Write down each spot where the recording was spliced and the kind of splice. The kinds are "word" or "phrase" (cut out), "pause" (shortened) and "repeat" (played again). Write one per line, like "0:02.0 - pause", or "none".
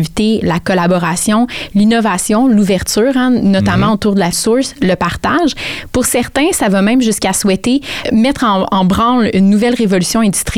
0:04.3 - phrase
0:08.0 - word

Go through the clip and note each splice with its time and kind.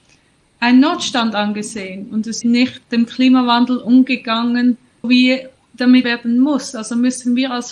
0:02.4 - word
0:02.8 - word
0:05.0 - word
0:06.0 - word

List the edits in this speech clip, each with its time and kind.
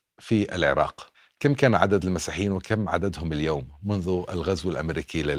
0:01.1 - pause

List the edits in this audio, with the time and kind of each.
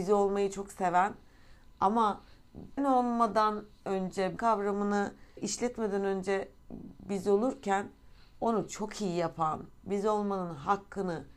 0:02.8 - word
0:04.4 - word
0:05.4 - word

